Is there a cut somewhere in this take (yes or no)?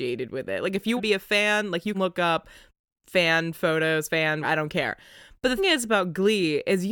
yes